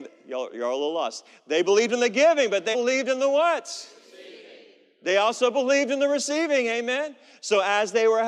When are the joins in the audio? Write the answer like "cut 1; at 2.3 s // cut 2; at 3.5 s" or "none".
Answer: cut 1; at 2.7 s